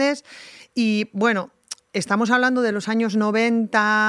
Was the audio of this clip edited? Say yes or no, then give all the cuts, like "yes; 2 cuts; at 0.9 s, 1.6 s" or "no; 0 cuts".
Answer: no; 0 cuts